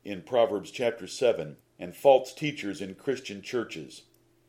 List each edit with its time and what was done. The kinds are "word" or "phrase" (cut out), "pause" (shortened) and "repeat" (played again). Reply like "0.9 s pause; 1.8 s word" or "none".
1.6 s pause